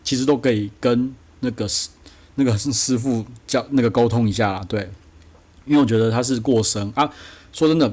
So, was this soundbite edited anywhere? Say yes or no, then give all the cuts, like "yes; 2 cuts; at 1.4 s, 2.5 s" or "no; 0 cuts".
no; 0 cuts